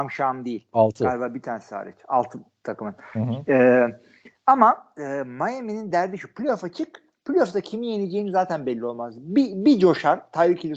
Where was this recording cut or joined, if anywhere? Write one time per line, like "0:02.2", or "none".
none